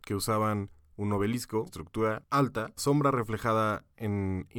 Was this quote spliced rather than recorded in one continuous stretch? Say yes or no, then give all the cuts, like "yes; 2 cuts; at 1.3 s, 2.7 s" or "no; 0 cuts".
yes; 2 cuts; at 1.7 s, 2.8 s